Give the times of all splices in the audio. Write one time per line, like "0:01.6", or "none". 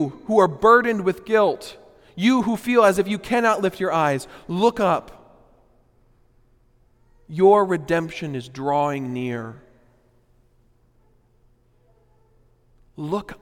none